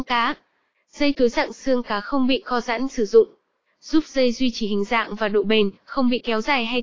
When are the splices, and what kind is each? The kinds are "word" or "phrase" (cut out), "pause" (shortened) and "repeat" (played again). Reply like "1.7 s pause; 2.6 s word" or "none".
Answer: 2.9 s word